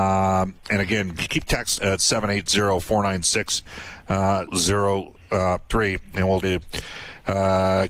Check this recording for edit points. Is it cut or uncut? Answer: cut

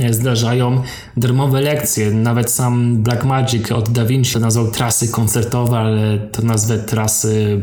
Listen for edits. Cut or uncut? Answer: cut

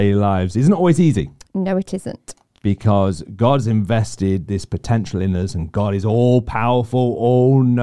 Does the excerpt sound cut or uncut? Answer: uncut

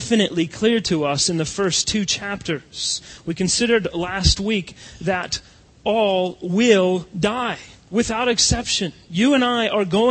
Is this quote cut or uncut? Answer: uncut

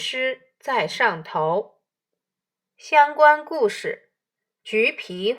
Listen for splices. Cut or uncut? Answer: uncut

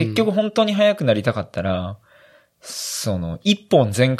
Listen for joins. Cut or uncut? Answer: uncut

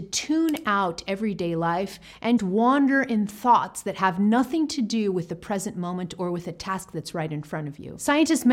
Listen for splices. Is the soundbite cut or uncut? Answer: cut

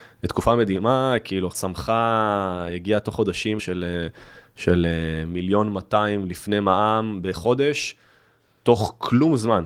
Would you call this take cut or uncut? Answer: cut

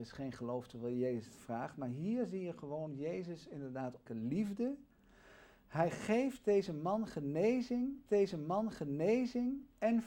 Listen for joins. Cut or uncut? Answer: cut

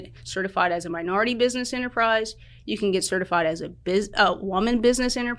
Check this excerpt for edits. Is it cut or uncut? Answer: uncut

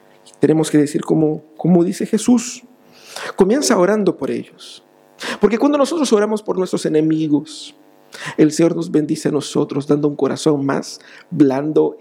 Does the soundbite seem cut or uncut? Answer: uncut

